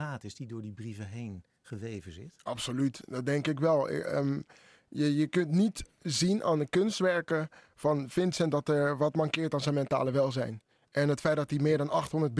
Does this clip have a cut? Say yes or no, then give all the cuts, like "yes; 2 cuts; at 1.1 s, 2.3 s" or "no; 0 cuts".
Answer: no; 0 cuts